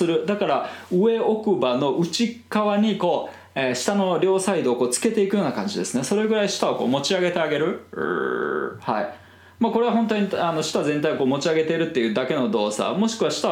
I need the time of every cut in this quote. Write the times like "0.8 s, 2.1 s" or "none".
none